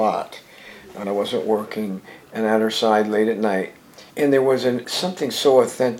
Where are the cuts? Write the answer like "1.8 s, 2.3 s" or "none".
1.0 s, 4.1 s, 4.8 s